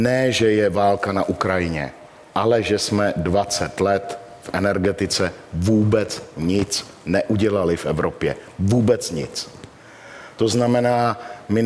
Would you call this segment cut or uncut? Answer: uncut